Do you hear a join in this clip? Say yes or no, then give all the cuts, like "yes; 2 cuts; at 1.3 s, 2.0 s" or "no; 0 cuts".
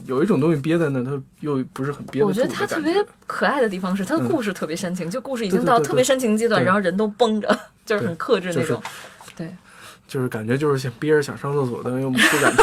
yes; 2 cuts; at 9.3 s, 10.0 s